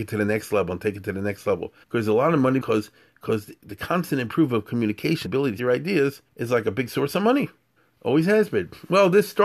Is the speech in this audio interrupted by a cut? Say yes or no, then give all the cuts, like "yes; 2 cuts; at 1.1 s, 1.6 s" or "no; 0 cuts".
yes; 6 cuts; at 1.8 s, 2.6 s, 5.3 s, 5.6 s, 6.3 s, 7.8 s